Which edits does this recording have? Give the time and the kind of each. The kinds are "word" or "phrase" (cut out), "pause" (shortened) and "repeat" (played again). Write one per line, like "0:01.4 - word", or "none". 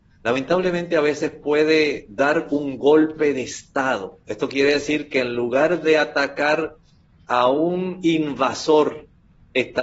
none